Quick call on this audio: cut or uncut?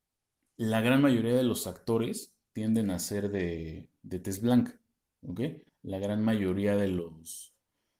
uncut